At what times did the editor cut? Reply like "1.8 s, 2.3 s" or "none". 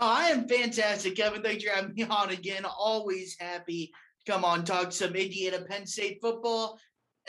none